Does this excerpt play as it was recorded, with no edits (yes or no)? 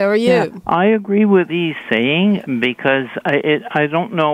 no